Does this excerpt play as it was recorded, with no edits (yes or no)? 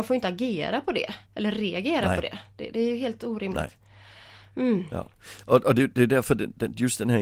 no